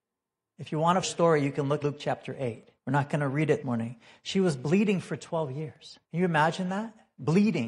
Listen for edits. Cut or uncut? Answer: cut